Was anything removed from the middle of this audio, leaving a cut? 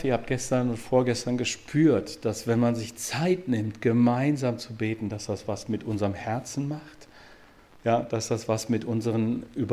no; 0 cuts

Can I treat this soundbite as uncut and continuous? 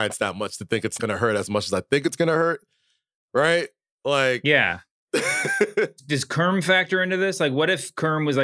no; 1 cut; at 1.0 s

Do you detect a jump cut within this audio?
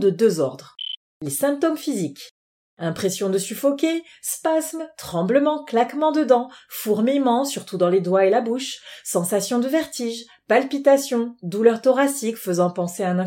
no; 0 cuts

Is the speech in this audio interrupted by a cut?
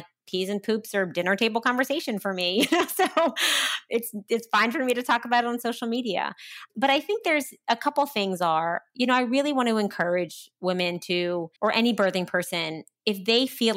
yes; 1 cut; at 11.6 s

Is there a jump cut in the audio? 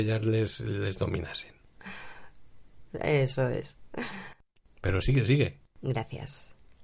no; 0 cuts

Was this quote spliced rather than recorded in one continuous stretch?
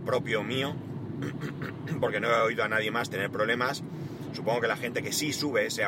no; 0 cuts

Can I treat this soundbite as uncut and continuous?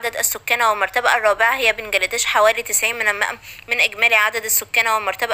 yes; 0 cuts

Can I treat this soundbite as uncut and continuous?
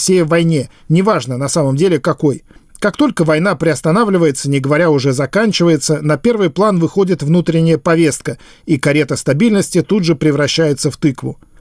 yes; 0 cuts

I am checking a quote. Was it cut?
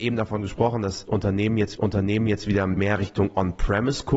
yes; 2 cuts; at 1.7 s, 2.8 s

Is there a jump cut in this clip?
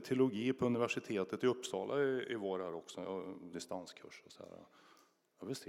yes; 1 cut; at 3.5 s

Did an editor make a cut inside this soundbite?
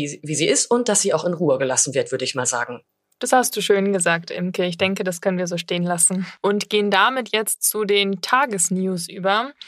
no; 0 cuts

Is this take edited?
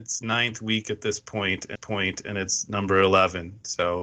yes; 1 cut; at 1.7 s

